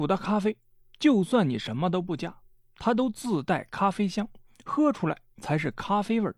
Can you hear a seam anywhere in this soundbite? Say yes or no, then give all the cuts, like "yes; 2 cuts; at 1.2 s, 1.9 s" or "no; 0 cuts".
no; 0 cuts